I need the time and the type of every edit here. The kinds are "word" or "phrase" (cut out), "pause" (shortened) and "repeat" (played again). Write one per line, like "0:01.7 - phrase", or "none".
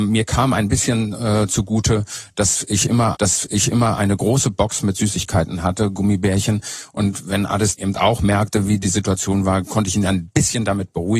0:03.1 - repeat
0:07.7 - word